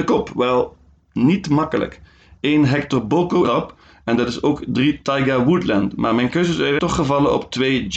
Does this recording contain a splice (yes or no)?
yes